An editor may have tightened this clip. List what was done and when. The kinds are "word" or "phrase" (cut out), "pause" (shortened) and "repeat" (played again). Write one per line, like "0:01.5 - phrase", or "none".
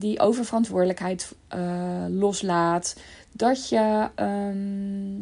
none